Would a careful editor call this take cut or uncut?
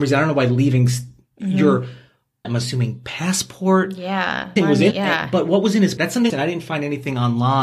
cut